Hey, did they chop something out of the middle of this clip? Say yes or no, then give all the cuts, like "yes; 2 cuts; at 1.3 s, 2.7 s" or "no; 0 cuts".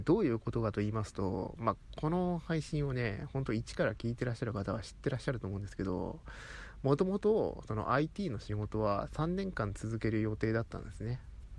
no; 0 cuts